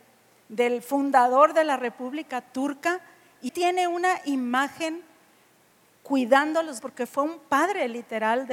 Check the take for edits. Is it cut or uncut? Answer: cut